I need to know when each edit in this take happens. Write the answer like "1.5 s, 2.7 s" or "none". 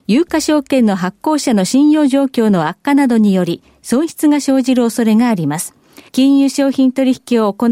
6.1 s